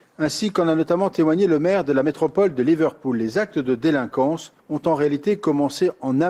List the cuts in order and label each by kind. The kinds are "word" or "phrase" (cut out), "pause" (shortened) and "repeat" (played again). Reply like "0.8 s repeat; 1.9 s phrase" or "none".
4.6 s pause